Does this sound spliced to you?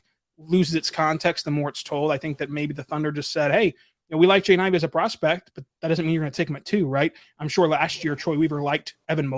no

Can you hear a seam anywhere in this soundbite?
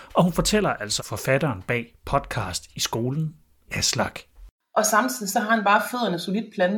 yes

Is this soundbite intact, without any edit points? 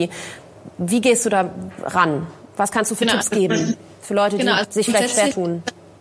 yes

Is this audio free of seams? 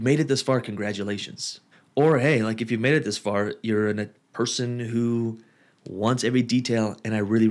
no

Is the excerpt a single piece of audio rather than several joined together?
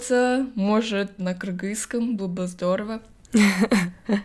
no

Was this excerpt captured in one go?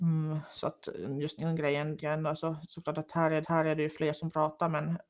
no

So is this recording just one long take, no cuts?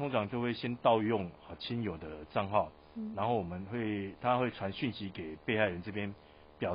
yes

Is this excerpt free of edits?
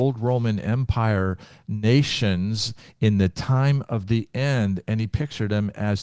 yes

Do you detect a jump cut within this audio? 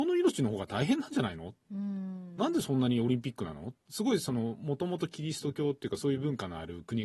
yes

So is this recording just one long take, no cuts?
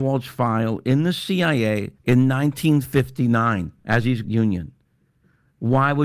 no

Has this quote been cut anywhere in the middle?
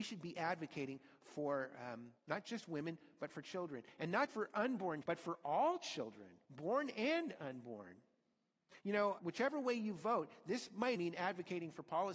yes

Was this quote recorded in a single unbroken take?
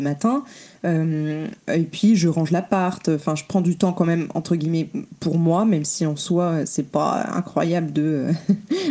yes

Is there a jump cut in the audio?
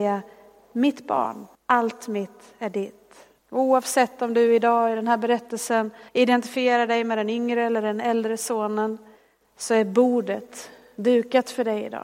yes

